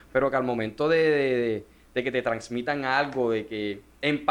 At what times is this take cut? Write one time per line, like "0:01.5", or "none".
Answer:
none